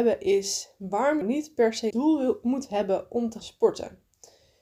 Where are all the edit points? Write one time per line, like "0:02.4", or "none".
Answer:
0:01.2
0:01.9
0:03.4